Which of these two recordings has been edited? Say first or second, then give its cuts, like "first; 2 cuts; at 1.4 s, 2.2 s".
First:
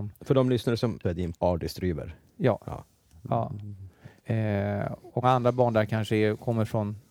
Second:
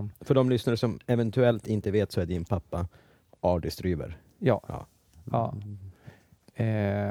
first; 4 cuts; at 1.0 s, 1.3 s, 4.2 s, 5.2 s